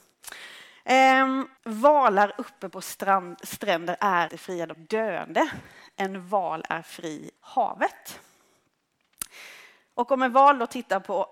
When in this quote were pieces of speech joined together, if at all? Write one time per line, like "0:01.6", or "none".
0:01.6
0:04.3
0:04.7
0:07.4